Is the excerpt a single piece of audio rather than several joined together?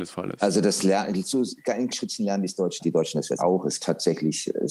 no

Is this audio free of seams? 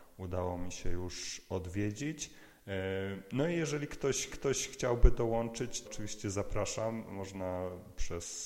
no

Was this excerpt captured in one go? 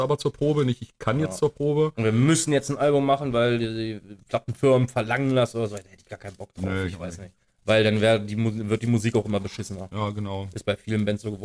no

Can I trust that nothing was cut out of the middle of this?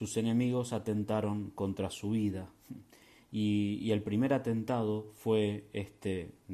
yes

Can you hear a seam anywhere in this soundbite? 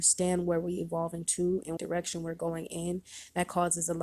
yes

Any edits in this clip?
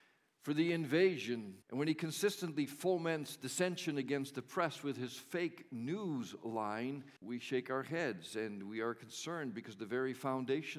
yes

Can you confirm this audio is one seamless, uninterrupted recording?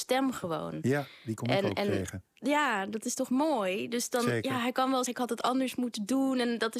no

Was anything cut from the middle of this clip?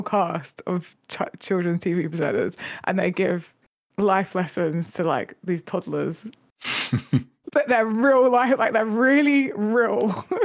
no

